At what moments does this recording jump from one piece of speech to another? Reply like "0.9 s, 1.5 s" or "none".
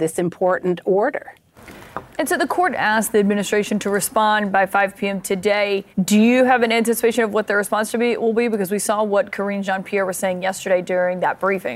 5.9 s